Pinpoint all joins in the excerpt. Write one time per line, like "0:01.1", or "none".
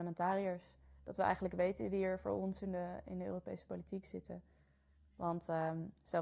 none